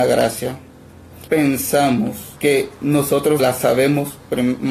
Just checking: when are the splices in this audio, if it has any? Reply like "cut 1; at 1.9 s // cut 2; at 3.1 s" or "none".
cut 1; at 1.3 s // cut 2; at 2.4 s // cut 3; at 3.4 s